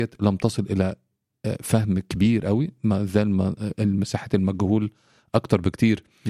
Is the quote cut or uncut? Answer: uncut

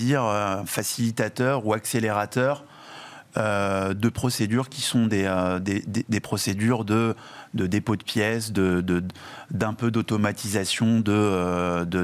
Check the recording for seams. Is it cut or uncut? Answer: uncut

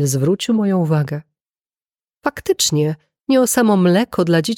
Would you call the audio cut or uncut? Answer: uncut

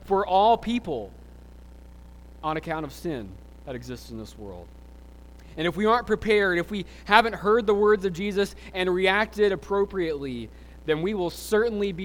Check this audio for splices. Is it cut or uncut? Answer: uncut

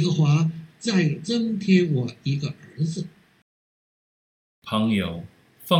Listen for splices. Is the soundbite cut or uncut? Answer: uncut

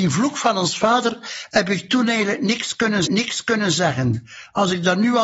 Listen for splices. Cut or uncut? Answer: cut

